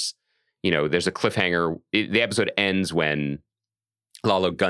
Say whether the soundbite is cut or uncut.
uncut